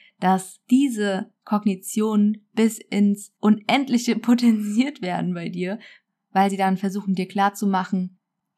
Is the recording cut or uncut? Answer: uncut